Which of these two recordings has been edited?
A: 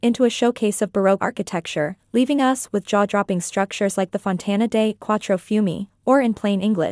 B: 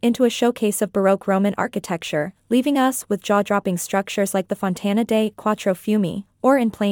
A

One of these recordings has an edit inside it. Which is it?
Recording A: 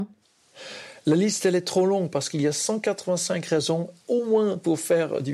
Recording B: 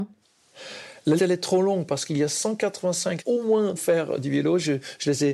B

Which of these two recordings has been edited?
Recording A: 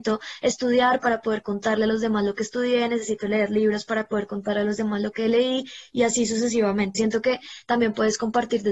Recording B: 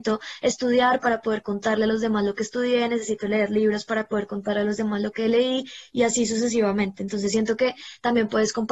A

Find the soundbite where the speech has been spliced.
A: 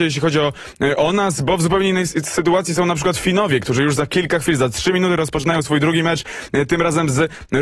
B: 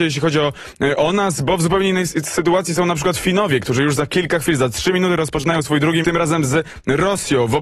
B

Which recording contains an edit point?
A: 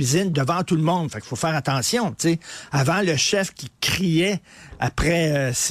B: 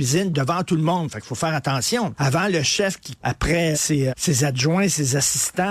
B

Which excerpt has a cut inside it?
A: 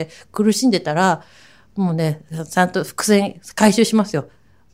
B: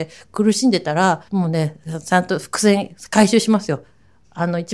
B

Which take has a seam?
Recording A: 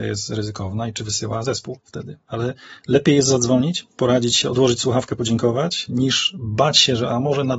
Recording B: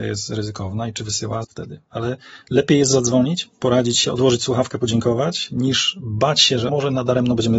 B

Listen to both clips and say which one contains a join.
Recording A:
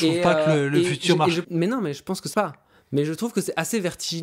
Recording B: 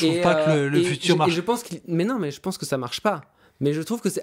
A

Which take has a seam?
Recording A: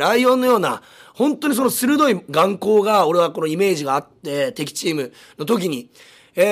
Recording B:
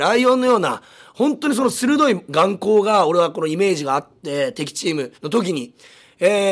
B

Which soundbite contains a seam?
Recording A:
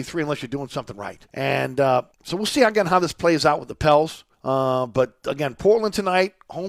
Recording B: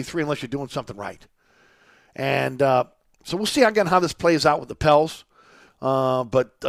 A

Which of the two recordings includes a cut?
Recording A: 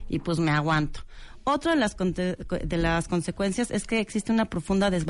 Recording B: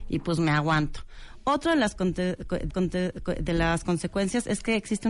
B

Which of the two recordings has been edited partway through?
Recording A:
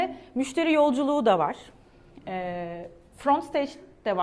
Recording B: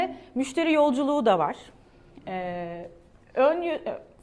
A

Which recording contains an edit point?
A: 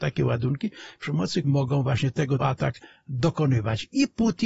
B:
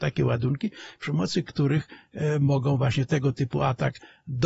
A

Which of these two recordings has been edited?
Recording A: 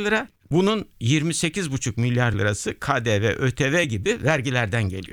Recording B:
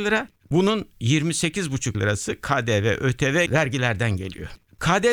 B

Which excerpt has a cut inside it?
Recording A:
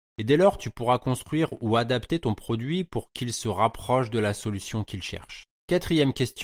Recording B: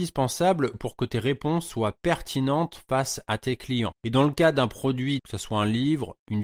B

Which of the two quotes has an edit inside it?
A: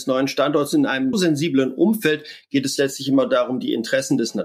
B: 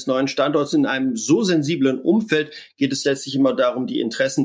A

